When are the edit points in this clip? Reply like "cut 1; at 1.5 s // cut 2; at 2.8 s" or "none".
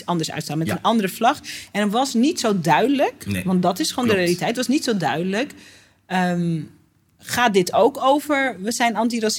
cut 1; at 7.2 s